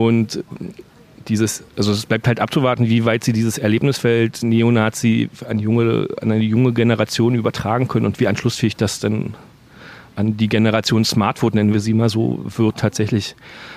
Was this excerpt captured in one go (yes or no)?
no